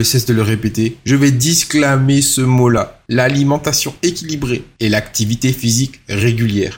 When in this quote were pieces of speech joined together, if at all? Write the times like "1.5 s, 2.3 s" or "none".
none

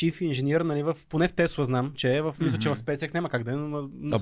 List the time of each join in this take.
none

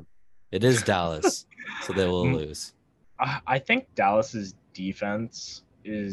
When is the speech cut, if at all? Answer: 1.5 s, 3.9 s

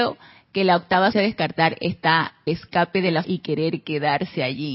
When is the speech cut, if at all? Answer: 1.1 s, 2.5 s, 3.2 s

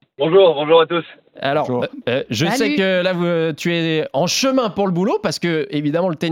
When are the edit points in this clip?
none

